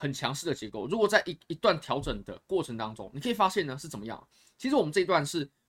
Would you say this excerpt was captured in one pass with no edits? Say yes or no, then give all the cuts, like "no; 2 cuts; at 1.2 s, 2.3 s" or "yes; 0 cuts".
yes; 0 cuts